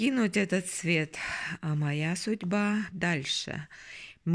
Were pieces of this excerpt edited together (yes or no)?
yes